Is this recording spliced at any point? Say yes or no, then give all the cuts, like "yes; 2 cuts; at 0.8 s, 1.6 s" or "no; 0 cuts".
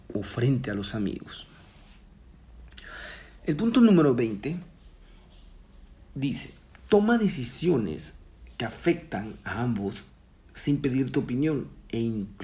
no; 0 cuts